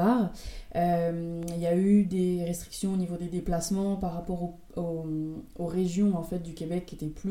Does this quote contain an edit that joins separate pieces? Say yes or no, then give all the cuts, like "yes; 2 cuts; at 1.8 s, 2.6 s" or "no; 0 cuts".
no; 0 cuts